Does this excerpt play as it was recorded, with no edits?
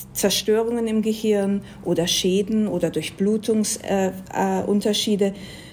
yes; 0 cuts

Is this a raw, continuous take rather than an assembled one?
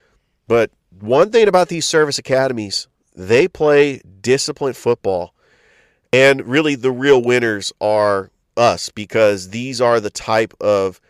yes; 0 cuts

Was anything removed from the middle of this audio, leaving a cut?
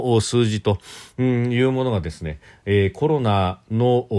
no; 0 cuts

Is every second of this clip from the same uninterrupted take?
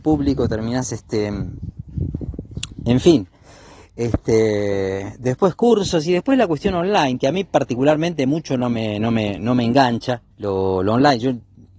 no; 1 cut; at 10.3 s

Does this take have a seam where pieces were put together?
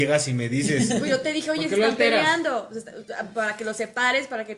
no; 0 cuts

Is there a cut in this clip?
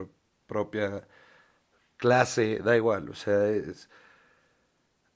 no; 0 cuts

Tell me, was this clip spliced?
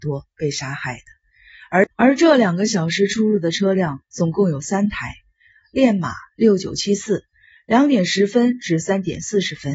yes; 1 cut; at 1.9 s

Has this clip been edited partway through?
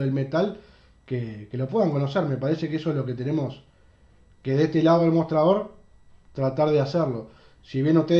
no; 0 cuts

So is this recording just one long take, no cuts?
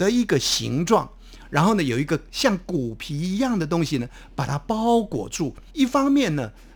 no; 1 cut; at 5.7 s

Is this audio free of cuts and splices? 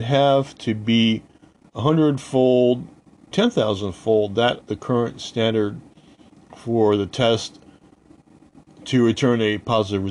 no; 2 cuts; at 3.3 s, 4.6 s

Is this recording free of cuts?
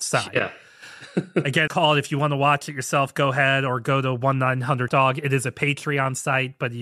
no; 2 cuts; at 1.7 s, 4.9 s

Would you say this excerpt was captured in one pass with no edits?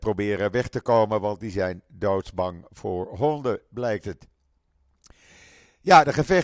yes; 0 cuts

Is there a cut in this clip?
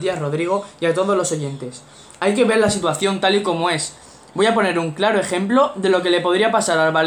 no; 0 cuts

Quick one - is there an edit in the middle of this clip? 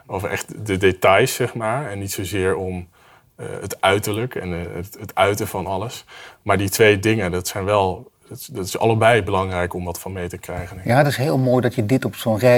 no; 0 cuts

